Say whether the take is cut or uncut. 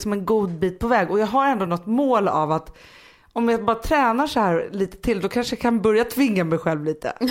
uncut